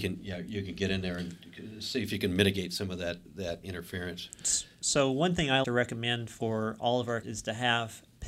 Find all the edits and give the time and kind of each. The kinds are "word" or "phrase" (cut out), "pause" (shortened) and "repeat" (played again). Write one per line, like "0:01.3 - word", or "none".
0:03.2 - word
0:03.6 - word
0:05.6 - word
0:07.2 - word